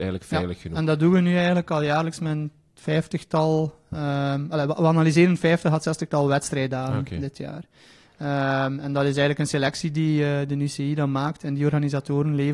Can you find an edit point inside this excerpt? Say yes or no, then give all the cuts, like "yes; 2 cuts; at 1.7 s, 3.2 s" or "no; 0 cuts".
no; 0 cuts